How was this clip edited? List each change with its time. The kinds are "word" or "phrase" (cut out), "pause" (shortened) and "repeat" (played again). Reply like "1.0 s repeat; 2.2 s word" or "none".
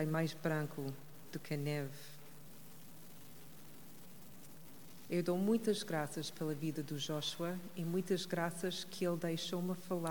none